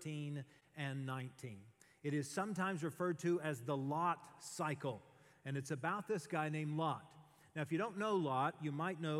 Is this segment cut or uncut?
uncut